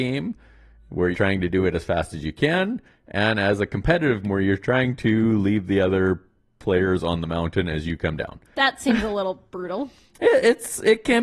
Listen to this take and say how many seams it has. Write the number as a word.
three